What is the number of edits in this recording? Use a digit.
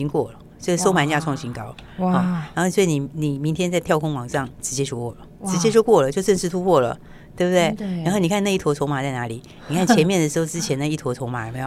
1